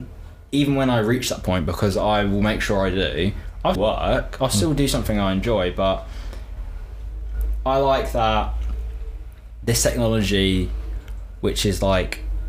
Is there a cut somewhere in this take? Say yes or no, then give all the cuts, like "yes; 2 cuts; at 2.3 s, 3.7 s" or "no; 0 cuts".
yes; 1 cut; at 3.7 s